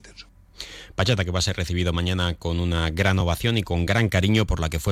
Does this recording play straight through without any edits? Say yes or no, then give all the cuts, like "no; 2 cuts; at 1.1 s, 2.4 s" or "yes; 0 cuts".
yes; 0 cuts